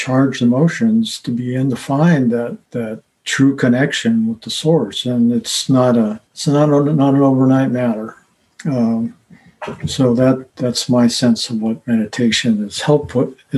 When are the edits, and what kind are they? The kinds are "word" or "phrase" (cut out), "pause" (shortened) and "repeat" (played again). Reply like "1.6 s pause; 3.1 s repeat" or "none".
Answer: 2.7 s pause; 6.3 s pause; 10.5 s pause